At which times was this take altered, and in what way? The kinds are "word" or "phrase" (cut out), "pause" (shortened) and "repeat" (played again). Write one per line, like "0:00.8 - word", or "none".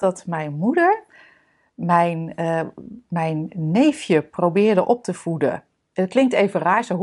none

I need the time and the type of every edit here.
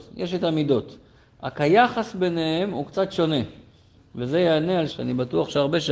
0:04.9 - word

